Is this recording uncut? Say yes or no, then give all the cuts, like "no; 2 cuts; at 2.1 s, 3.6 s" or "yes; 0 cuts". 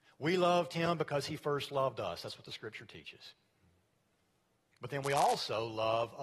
yes; 0 cuts